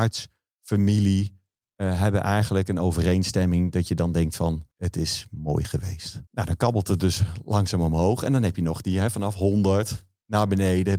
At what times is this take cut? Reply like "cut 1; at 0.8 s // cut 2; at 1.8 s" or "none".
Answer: cut 1; at 4.7 s // cut 2; at 6.3 s